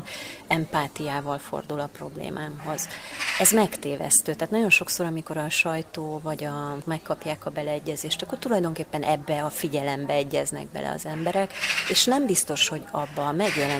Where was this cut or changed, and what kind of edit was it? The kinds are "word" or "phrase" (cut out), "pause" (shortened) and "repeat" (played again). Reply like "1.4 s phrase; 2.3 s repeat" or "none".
6.8 s phrase